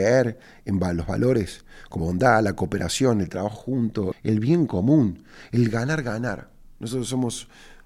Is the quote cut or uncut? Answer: cut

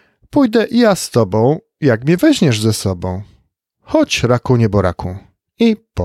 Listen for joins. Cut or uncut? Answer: uncut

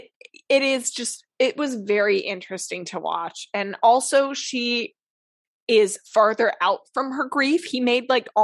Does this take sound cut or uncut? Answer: uncut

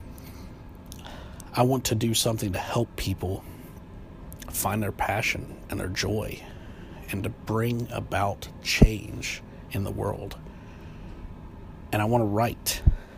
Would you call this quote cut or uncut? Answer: uncut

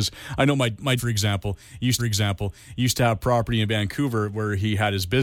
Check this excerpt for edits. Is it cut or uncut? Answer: cut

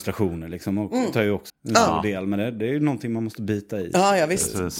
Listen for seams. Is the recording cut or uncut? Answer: cut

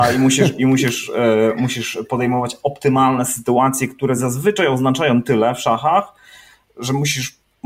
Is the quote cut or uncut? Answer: uncut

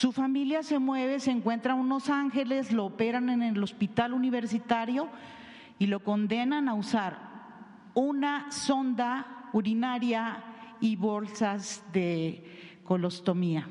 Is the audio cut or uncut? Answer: uncut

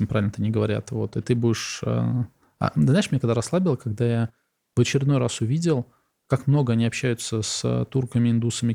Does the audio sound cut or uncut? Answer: uncut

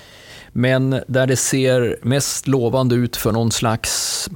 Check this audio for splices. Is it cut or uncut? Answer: uncut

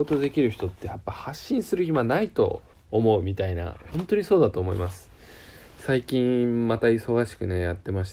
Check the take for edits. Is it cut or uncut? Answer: cut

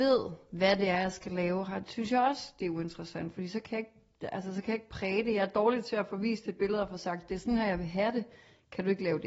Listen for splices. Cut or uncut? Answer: uncut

